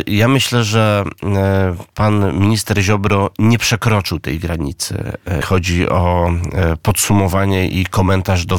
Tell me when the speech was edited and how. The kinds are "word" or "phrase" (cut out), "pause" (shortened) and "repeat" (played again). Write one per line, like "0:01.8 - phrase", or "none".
0:05.4 - word